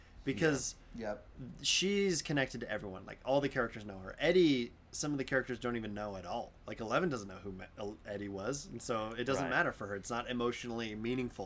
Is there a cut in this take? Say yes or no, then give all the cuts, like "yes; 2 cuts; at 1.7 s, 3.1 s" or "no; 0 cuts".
no; 0 cuts